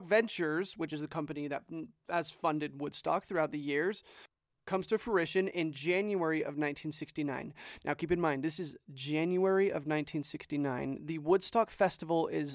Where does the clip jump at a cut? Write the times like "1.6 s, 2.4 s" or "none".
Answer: none